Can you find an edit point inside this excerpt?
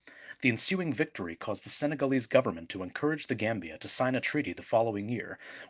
no; 0 cuts

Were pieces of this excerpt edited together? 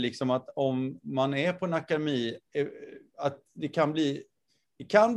yes; 1 cut; at 2.5 s

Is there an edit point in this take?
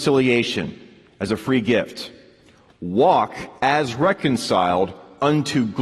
yes; 1 cut; at 3.6 s

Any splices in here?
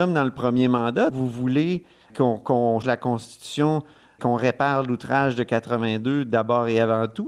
yes; 4 cuts; at 1.1 s, 2.1 s, 2.8 s, 4.2 s

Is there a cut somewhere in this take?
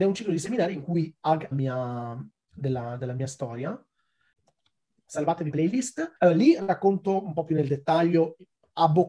yes; 3 cuts; at 1.5 s, 5.5 s, 6.2 s

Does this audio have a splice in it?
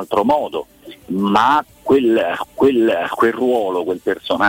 yes; 1 cut; at 2.4 s

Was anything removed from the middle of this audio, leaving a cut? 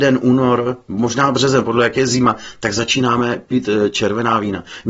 no; 0 cuts

